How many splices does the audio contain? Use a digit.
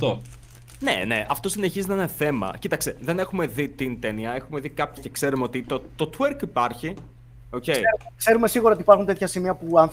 1